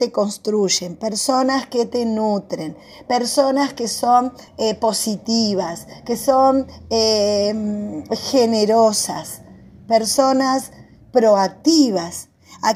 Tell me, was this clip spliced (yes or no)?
yes